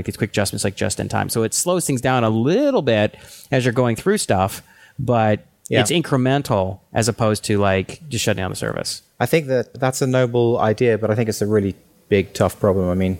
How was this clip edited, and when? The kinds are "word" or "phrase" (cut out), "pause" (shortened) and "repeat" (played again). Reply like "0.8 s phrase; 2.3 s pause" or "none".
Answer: 9.7 s word